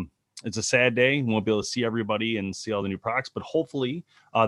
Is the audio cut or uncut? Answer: uncut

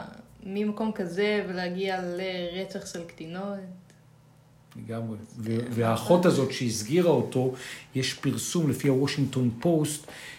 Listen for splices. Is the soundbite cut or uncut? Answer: uncut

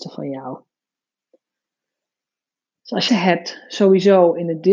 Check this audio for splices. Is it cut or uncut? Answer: cut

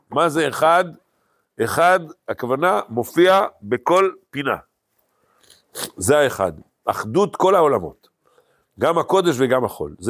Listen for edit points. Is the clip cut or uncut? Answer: uncut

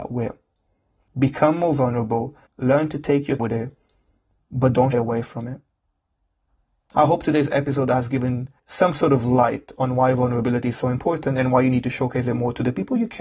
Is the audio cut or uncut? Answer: cut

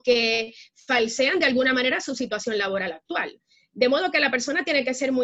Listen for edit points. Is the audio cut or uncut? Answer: uncut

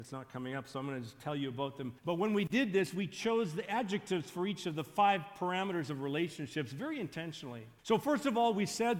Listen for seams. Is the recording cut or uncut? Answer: cut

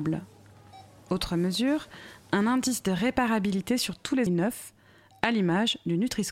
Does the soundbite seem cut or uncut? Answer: cut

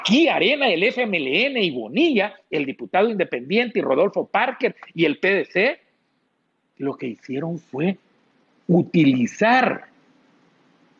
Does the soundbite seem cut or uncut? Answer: uncut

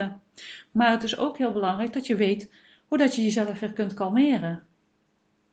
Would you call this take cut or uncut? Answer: uncut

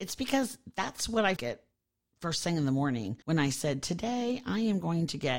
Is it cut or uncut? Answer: cut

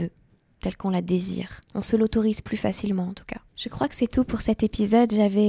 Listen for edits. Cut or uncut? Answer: cut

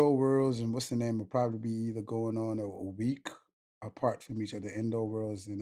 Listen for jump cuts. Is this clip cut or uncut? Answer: uncut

